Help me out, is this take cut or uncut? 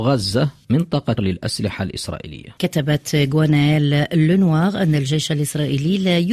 cut